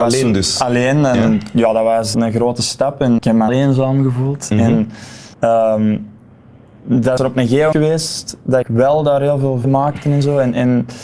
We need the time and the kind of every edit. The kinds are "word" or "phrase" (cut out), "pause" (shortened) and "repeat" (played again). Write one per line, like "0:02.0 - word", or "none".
0:02.1 - word
0:03.2 - word
0:03.5 - phrase
0:05.3 - pause
0:07.2 - word
0:07.7 - phrase
0:08.6 - word
0:09.6 - word